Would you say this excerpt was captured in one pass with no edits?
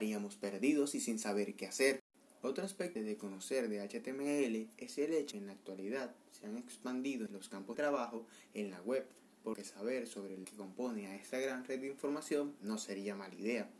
no; 6 cuts; at 3.0 s, 5.3 s, 7.3 s, 7.7 s, 9.5 s, 10.4 s

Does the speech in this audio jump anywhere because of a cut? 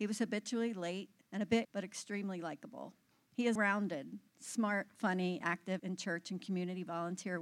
yes; 6 cuts; at 1.2 s, 1.6 s, 3.1 s, 3.6 s, 5.4 s, 5.8 s

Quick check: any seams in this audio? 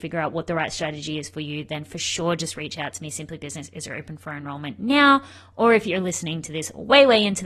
no; 0 cuts

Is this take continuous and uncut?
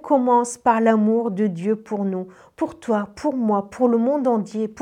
yes; 0 cuts

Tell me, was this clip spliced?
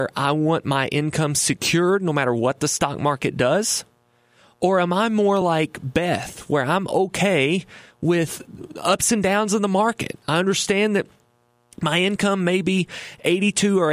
no; 0 cuts

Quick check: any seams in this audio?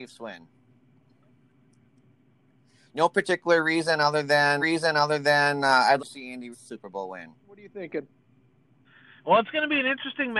yes; 4 cuts; at 4.6 s, 6.0 s, 6.5 s, 7.4 s

